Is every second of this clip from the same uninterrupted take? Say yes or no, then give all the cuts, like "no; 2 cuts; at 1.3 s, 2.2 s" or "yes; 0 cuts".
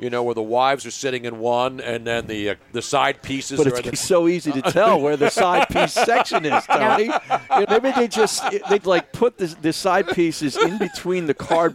no; 4 cuts; at 2.6 s, 3.9 s, 7.6 s, 8.8 s